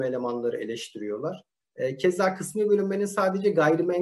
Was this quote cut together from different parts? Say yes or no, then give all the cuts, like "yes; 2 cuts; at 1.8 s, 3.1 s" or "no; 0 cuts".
no; 0 cuts